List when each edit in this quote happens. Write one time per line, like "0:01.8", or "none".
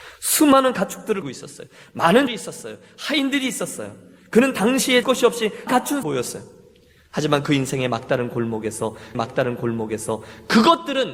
0:01.2
0:02.3
0:05.0
0:05.7
0:06.0
0:09.1